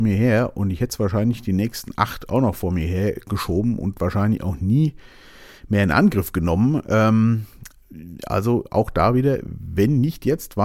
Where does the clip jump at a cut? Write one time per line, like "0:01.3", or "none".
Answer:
none